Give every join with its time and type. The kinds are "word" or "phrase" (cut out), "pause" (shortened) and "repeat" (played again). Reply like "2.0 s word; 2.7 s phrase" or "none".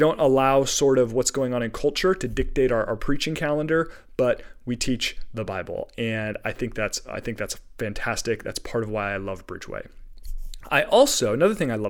none